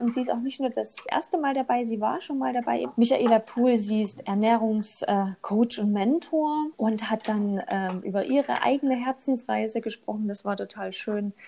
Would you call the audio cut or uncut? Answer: uncut